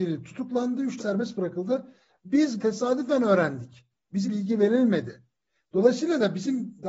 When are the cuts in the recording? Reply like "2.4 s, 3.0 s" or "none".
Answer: 1.0 s, 2.6 s, 4.2 s